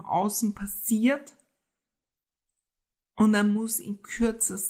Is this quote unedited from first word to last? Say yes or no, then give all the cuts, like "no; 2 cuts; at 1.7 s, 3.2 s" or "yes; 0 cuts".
yes; 0 cuts